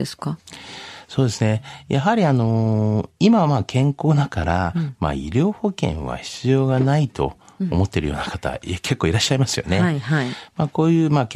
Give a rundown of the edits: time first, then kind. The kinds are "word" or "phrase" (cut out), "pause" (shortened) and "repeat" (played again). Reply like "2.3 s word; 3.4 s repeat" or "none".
3.2 s pause